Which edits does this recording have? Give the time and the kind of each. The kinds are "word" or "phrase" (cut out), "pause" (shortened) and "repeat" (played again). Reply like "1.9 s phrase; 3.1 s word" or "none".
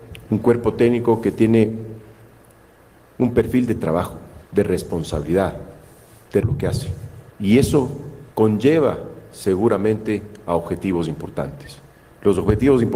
4.5 s pause; 6.4 s phrase; 7.3 s pause; 8.3 s pause